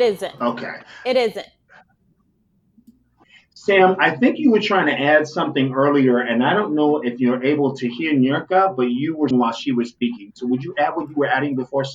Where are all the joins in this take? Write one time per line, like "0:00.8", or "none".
0:09.3